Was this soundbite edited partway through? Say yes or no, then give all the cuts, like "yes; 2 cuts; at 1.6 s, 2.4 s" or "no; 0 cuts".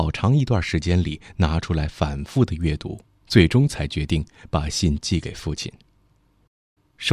yes; 1 cut; at 3.1 s